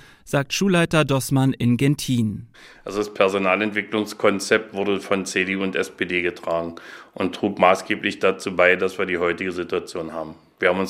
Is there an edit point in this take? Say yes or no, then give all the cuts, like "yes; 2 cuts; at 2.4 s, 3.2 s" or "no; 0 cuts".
no; 0 cuts